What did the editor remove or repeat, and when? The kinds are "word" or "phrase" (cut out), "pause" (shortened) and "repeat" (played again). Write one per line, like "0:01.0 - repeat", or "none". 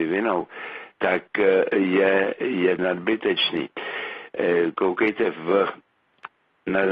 0:00.9 - pause
0:02.8 - phrase